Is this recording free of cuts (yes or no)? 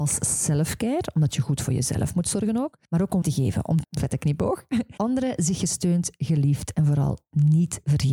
no